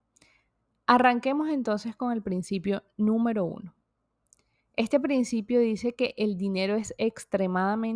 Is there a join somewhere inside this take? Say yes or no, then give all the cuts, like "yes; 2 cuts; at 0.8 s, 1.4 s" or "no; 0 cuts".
no; 0 cuts